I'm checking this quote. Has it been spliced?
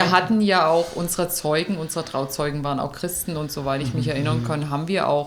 no; 0 cuts

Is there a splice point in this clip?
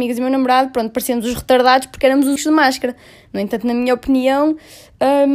yes; 1 cut; at 2.4 s

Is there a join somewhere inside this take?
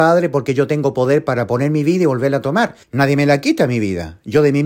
yes; 1 cut; at 2.8 s

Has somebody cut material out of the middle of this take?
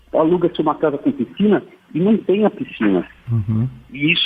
no; 0 cuts

